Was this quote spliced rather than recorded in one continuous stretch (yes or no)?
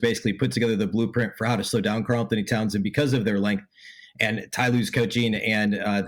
no